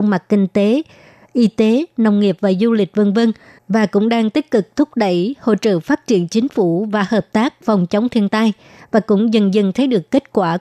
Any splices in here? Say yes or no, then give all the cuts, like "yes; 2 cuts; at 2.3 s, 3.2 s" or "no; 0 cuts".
no; 0 cuts